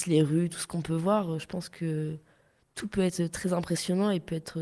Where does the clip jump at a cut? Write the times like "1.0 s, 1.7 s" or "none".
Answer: none